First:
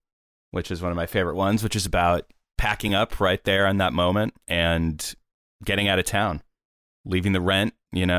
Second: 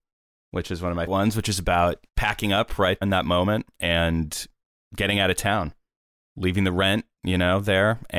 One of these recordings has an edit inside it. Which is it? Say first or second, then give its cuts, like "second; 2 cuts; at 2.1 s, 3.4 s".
second; 3 cuts; at 1.1 s, 2.1 s, 3.0 s